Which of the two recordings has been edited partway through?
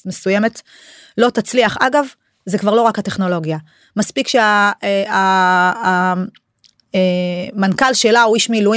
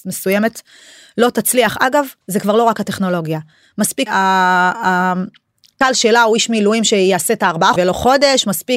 second; 4 cuts; at 2.2 s, 4.1 s, 5.8 s, 7.8 s

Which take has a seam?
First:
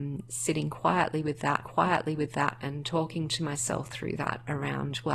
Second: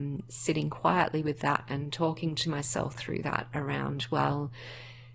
first; 1 cut; at 1.7 s

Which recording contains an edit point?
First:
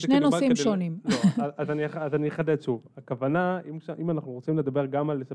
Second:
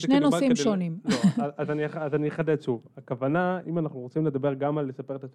second; 1 cut; at 3.6 s

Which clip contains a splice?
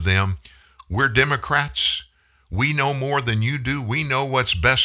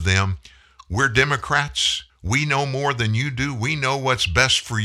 second; 1 cut; at 2.1 s

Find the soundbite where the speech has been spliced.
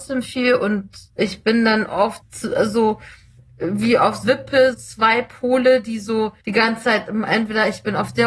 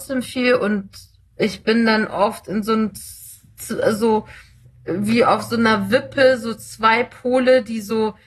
first; 5 cuts; at 1.1 s, 2.2 s, 4.2 s, 4.7 s, 6.4 s

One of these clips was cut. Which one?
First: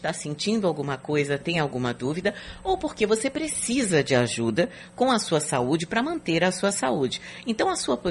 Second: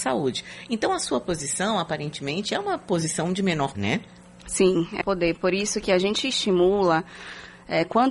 second; 2 cuts; at 3.7 s, 5.0 s

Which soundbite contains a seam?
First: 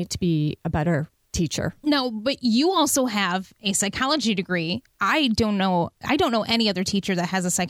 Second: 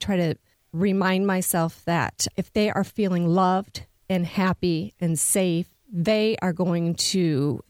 first; 1 cut; at 1.8 s

